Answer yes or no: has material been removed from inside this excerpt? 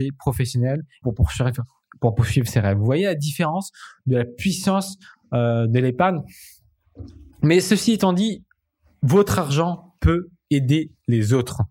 yes